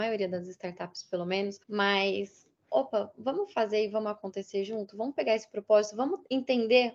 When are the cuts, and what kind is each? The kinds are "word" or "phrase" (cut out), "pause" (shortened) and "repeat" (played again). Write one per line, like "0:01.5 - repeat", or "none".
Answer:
0:01.6 - pause